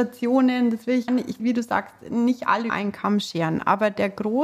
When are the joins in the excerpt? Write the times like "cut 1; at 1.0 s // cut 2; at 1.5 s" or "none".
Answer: cut 1; at 1.1 s // cut 2; at 1.4 s // cut 3; at 2.7 s